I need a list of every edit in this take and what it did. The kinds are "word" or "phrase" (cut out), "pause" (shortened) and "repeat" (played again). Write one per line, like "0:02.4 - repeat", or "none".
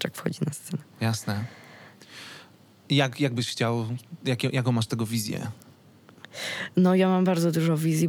none